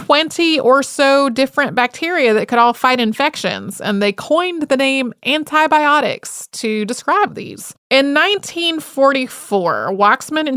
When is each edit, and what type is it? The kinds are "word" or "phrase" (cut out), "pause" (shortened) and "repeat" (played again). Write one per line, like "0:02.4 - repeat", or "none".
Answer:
0:07.3 - word
0:07.8 - pause